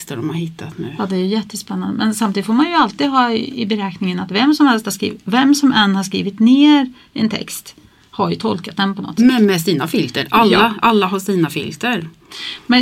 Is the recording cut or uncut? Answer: uncut